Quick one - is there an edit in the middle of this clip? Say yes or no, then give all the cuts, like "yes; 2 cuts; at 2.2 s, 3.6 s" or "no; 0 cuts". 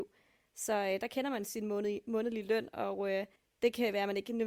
yes; 1 cut; at 3.4 s